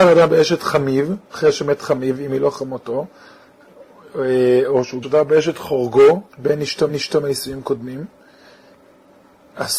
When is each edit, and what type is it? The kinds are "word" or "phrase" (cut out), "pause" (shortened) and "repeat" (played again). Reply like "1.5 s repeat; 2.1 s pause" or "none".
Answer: 1.2 s pause; 5.0 s word; 6.3 s pause; 6.9 s repeat